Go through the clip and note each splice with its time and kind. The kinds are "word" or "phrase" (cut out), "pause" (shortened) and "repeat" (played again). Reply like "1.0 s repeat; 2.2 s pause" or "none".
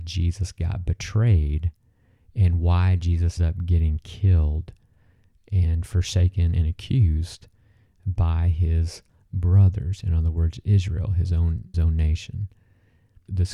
3.4 s word; 11.7 s word